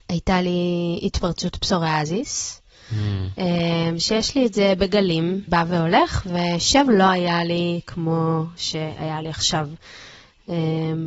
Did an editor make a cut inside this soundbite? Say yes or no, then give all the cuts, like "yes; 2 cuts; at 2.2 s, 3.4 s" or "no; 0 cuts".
yes; 2 cuts; at 5.5 s, 6.9 s